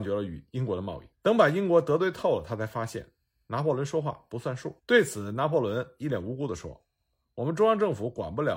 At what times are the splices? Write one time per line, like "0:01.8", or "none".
0:01.1
0:04.8